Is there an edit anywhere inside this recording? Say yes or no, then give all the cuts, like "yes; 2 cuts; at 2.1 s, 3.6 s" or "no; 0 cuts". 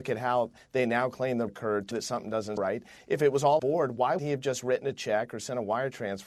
yes; 5 cuts; at 1.5 s, 1.9 s, 2.6 s, 3.6 s, 4.2 s